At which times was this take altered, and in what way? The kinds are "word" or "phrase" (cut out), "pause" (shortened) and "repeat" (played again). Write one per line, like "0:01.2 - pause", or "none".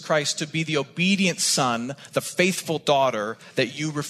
none